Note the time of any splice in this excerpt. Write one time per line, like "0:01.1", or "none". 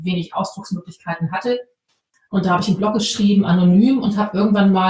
none